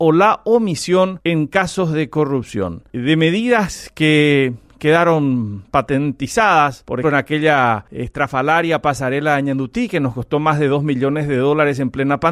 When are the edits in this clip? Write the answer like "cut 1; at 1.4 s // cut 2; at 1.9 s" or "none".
cut 1; at 7.0 s